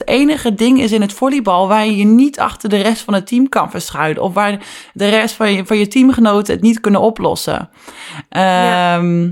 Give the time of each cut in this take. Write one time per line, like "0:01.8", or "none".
none